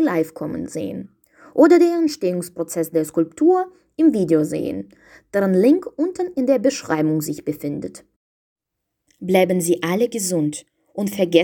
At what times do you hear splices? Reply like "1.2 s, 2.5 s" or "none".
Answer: none